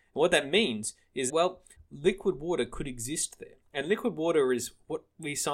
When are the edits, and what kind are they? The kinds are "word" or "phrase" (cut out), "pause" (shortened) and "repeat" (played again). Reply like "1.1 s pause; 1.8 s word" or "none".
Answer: 1.3 s word; 1.7 s pause; 3.7 s pause